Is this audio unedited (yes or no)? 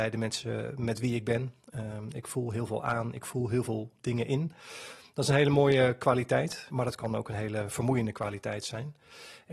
yes